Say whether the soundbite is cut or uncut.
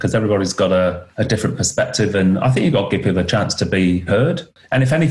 cut